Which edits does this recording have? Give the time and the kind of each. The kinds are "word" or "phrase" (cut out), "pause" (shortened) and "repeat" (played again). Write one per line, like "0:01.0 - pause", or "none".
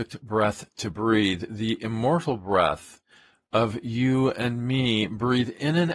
none

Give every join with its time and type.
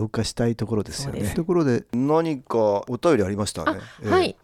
0:01.3 - word

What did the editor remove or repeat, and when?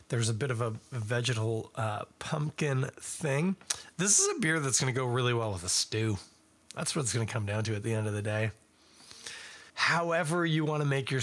0:09.7 - pause

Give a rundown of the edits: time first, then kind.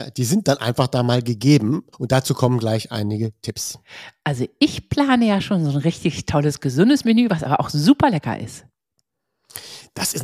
0:01.9 - pause

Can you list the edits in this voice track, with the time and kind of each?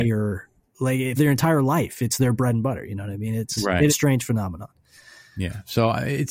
0:01.2 - word
0:03.6 - word
0:03.9 - word

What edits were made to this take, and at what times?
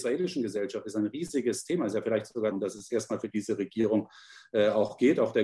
0:02.5 - phrase

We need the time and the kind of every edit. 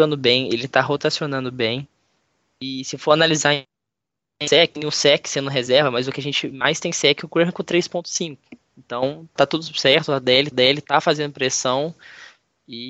0:09.4 - word
0:10.5 - repeat

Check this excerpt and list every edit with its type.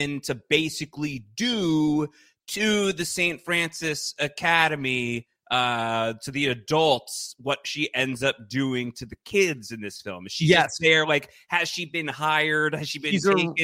none

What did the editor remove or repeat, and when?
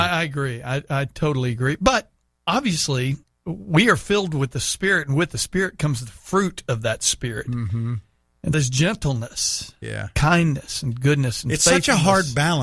0:03.2 - pause
0:08.5 - phrase

